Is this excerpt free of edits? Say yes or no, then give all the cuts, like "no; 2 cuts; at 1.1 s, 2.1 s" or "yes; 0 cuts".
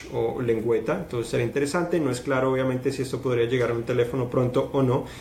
yes; 0 cuts